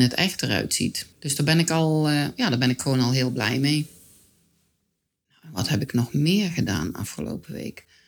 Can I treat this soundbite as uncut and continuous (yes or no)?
no